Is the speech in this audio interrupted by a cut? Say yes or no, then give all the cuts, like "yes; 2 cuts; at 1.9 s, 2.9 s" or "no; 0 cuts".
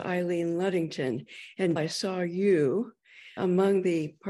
yes; 2 cuts; at 1.8 s, 3.4 s